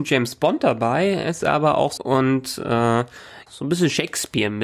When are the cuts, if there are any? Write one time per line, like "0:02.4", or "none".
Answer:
0:01.4
0:02.0
0:03.5